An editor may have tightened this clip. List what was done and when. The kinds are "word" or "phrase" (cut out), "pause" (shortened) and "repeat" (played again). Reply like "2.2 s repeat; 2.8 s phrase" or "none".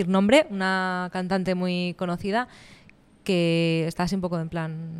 none

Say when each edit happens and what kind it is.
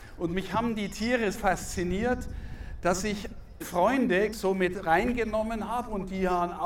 1.3 s word; 3.6 s word; 4.3 s word

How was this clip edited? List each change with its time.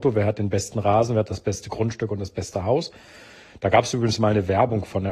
none

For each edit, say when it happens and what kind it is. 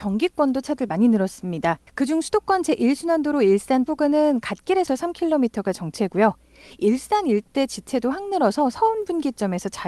1.9 s pause; 3.9 s phrase; 4.9 s phrase

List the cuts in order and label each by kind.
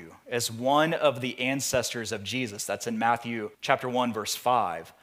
3.5 s pause

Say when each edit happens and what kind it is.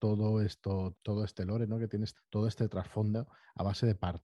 0.9 s word; 2.1 s word

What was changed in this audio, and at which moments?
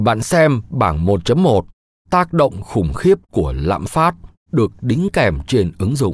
none

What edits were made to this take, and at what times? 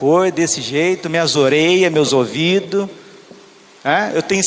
none

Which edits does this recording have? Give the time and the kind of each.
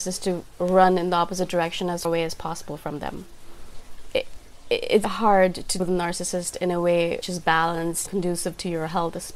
2.0 s word; 5.0 s word; 5.8 s word; 7.2 s word; 8.1 s word

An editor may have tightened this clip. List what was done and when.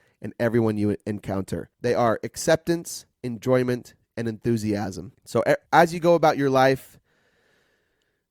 1.7 s pause; 5.1 s pause; 5.7 s pause

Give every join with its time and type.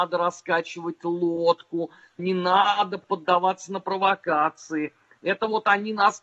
2.2 s word

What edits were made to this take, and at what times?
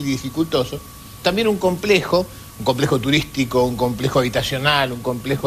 1.2 s word

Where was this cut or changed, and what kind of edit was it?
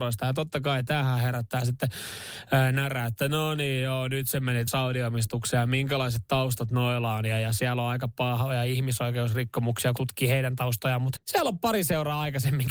4.7 s word; 10.0 s word; 11.2 s word

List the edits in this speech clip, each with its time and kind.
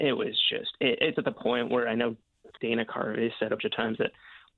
1.2 s word; 2.6 s word; 3.6 s word

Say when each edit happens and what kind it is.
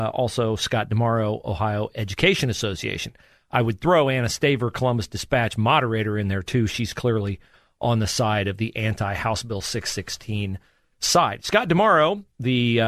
none

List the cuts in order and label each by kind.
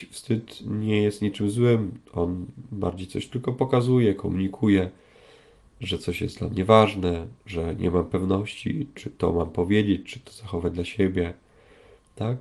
7.4 s pause

